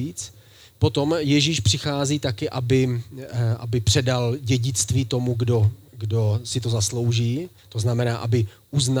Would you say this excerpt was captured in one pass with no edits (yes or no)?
no